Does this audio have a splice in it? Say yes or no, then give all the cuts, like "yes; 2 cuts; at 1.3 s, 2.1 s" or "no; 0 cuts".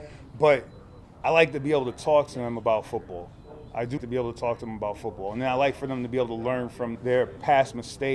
yes; 2 cuts; at 4.0 s, 7.0 s